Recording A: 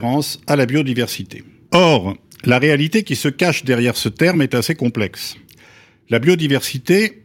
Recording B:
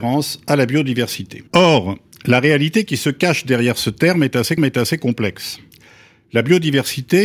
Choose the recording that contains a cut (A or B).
B